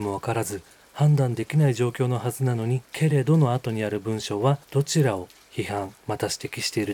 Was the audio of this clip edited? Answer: yes; 3 cuts; at 2.9 s, 4.6 s, 6.0 s

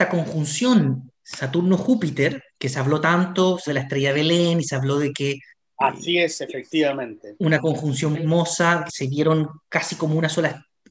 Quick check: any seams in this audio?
yes; 7 cuts; at 1.1 s, 2.5 s, 3.7 s, 5.5 s, 8.1 s, 8.9 s, 9.6 s

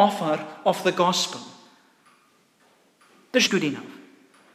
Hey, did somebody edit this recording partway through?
yes; 1 cut; at 3.5 s

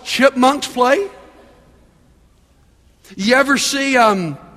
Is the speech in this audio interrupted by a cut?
no; 0 cuts

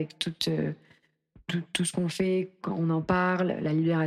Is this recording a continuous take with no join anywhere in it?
yes; 0 cuts

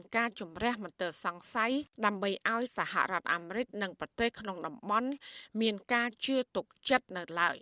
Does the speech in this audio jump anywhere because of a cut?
yes; 1 cut; at 1.9 s

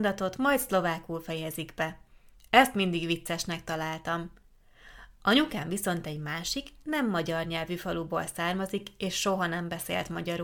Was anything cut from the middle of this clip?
no; 0 cuts

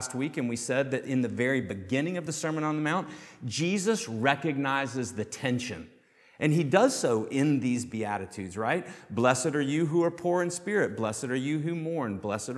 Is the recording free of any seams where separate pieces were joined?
yes; 0 cuts

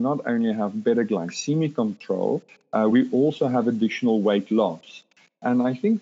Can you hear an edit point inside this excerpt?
no; 0 cuts

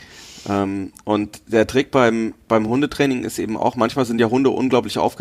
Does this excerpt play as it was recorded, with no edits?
yes; 0 cuts

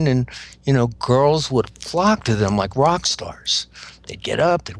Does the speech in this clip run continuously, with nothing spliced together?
yes; 0 cuts

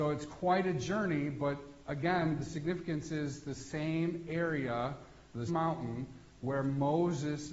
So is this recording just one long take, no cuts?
no; 1 cut; at 5.5 s

